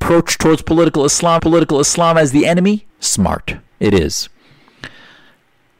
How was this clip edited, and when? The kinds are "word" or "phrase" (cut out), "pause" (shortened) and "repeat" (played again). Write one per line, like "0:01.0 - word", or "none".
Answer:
0:01.4 - repeat
0:02.9 - pause